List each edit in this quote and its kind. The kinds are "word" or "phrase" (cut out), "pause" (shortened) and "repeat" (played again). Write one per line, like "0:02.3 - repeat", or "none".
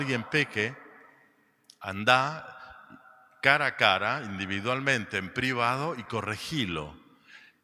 none